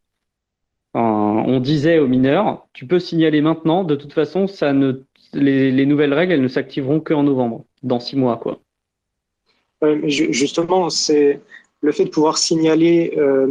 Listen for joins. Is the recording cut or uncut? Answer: uncut